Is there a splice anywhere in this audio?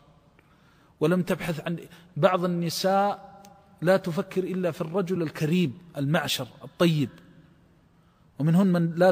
no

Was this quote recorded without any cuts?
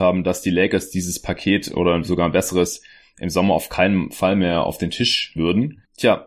no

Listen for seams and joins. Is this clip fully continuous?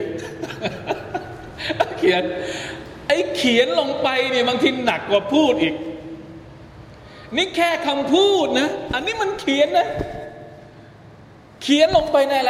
yes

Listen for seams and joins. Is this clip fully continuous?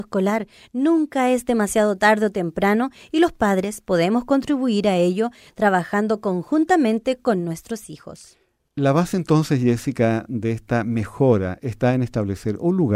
yes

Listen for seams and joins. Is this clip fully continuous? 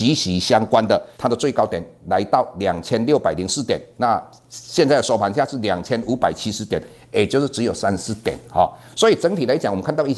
no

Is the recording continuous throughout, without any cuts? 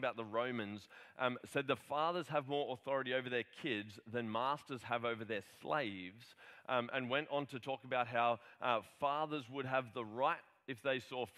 yes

